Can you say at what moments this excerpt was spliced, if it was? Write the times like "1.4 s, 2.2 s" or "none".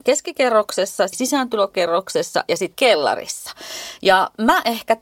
1.1 s, 2.7 s